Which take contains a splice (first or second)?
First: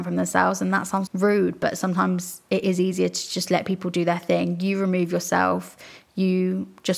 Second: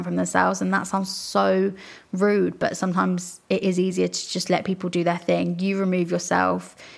first